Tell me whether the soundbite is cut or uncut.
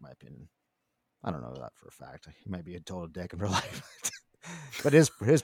uncut